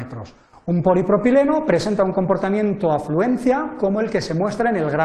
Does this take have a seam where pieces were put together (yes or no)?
no